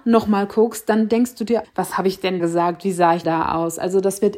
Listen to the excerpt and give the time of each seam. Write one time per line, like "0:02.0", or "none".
0:01.6
0:02.4
0:03.2